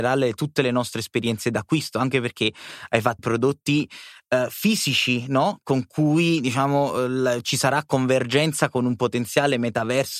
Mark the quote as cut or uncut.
cut